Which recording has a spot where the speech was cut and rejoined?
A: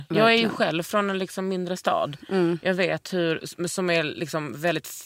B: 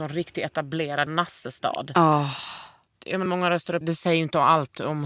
B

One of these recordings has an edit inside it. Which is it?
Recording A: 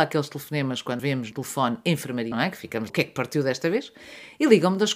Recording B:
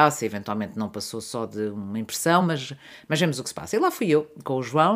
A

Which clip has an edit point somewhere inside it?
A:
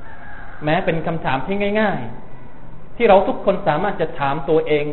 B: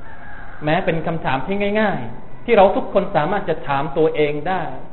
B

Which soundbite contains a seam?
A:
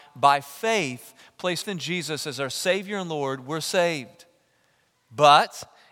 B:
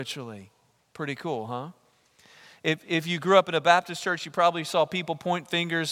A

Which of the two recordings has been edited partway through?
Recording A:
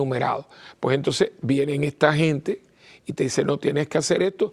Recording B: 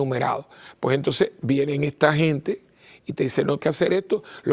B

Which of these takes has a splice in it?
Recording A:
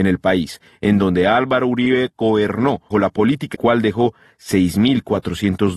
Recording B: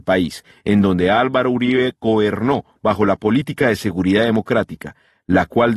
A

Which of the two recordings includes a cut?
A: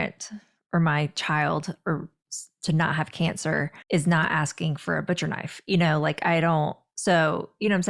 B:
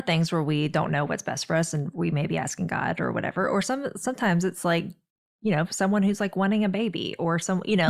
A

